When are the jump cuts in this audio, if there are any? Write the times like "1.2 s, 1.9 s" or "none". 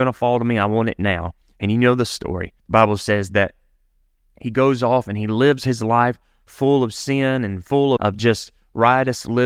2.6 s, 8.0 s